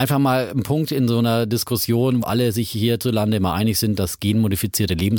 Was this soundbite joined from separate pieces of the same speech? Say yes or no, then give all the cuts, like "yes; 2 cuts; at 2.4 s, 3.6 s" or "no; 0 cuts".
yes; 1 cut; at 2.2 s